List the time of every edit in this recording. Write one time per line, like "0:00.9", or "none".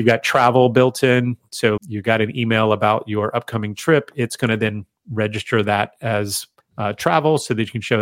0:01.8
0:06.6